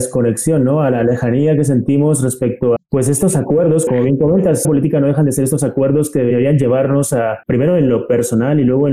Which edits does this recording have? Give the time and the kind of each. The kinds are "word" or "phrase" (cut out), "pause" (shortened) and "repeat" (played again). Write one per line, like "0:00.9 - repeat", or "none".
0:02.8 - word
0:03.9 - word
0:04.6 - phrase
0:07.4 - pause